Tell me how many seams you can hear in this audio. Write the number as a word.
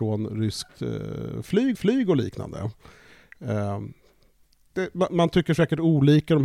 two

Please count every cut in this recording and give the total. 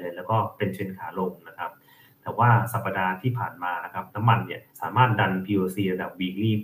one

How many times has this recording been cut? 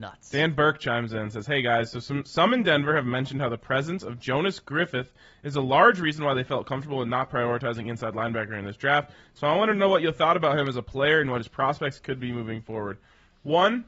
zero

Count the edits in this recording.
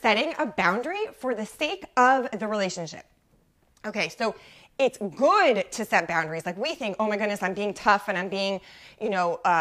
zero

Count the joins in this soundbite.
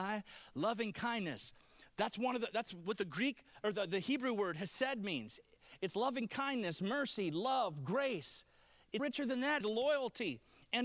two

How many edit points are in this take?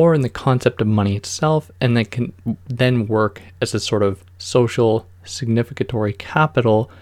zero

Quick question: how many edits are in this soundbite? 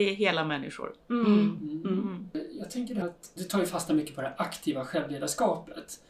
two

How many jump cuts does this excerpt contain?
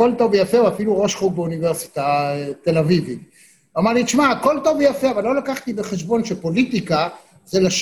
zero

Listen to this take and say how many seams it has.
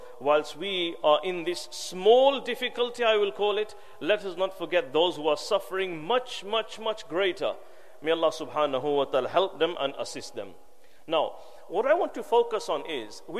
zero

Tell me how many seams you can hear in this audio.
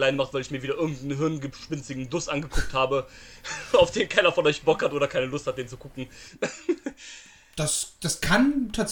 zero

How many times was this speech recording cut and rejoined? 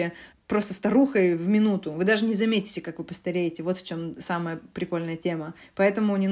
zero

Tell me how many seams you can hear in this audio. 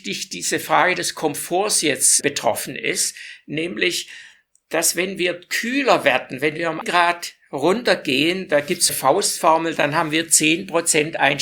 three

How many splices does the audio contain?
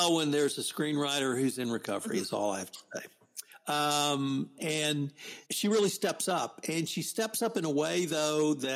one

